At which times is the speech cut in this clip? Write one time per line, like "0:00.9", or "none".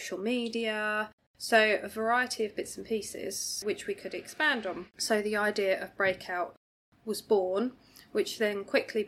none